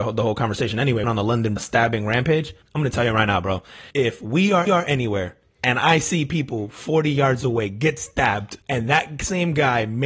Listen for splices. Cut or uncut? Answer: cut